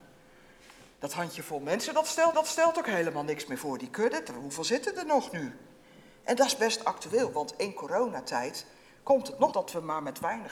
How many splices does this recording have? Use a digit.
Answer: 2